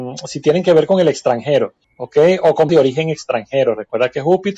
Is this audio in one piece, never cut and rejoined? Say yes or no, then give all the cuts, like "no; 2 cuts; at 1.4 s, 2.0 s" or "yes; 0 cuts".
no; 2 cuts; at 1.8 s, 2.7 s